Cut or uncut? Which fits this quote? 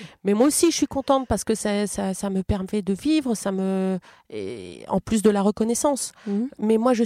uncut